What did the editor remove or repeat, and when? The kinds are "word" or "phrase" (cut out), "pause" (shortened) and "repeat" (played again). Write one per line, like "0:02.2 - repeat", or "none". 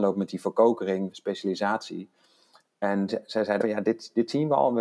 0:01.1 - word
0:03.1 - word
0:03.6 - word